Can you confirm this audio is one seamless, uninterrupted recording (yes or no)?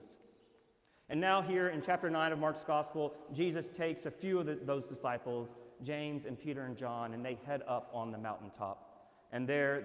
yes